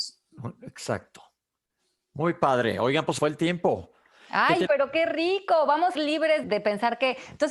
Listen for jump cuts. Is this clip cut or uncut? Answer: cut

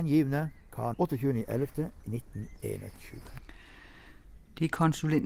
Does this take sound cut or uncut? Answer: cut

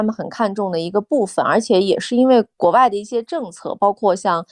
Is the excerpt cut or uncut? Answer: cut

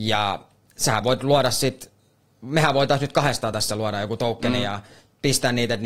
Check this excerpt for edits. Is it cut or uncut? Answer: uncut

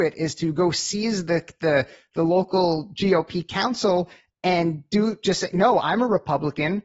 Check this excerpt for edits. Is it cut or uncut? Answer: uncut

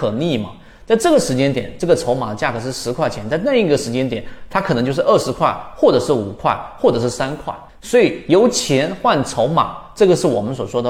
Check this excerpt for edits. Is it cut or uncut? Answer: cut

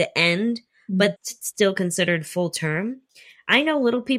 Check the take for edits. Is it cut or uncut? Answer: cut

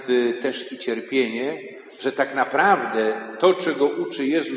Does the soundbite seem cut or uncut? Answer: uncut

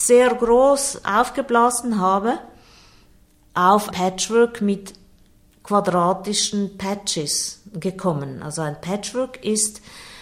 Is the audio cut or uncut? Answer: cut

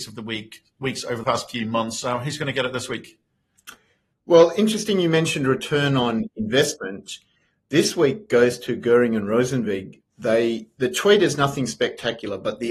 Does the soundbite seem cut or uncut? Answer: cut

